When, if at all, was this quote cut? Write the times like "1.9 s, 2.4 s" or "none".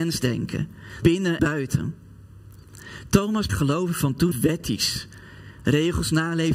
1.0 s, 1.4 s, 3.5 s, 4.3 s